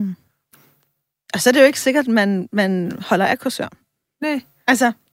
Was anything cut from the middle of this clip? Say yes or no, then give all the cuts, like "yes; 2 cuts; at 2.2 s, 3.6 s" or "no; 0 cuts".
no; 0 cuts